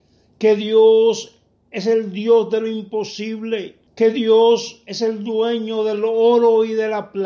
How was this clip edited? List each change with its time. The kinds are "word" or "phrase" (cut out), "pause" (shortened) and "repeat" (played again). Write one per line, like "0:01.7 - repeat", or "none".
0:03.9 - pause